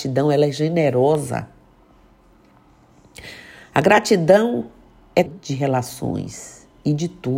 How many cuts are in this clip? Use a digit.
1